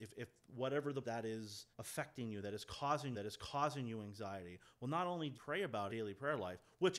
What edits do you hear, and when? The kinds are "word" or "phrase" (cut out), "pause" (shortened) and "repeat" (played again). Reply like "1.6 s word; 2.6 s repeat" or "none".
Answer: 1.0 s phrase; 1.7 s pause; 3.1 s repeat; 5.3 s word; 5.9 s phrase

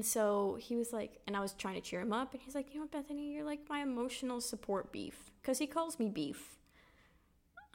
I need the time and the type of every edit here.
none

